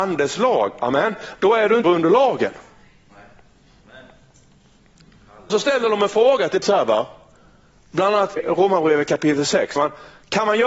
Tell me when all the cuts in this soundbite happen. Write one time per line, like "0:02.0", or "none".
0:01.8
0:05.5
0:06.6
0:08.4
0:09.8